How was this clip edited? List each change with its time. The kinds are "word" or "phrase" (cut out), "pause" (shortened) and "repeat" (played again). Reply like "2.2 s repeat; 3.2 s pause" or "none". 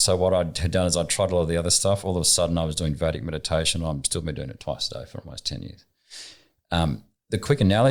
none